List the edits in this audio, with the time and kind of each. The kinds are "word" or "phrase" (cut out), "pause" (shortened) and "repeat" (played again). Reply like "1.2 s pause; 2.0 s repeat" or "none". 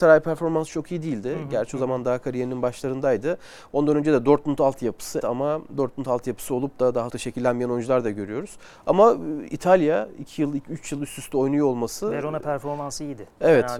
5.2 s word; 7.1 s phrase